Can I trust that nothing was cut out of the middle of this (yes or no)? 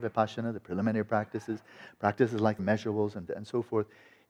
no